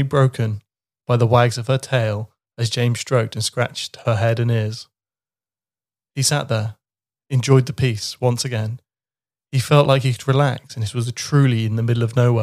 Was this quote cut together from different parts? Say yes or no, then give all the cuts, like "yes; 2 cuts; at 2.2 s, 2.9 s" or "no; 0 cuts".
no; 0 cuts